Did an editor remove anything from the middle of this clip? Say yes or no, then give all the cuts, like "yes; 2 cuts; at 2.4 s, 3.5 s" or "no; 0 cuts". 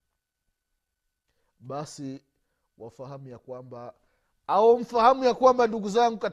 no; 0 cuts